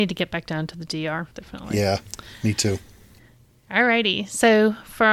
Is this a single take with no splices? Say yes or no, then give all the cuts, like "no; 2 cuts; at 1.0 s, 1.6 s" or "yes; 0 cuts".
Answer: no; 1 cut; at 1.3 s